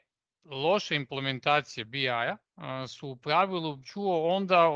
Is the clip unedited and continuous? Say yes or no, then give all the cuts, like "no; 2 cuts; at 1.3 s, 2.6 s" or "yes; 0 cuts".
no; 1 cut; at 3.8 s